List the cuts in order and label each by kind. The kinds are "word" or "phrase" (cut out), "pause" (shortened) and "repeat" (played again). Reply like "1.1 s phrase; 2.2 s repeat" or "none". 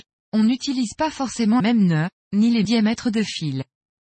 1.6 s word; 2.6 s word